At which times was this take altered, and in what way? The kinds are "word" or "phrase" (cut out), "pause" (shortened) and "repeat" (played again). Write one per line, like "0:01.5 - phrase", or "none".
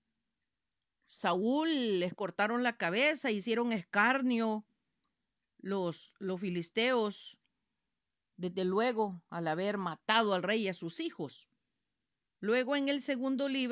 none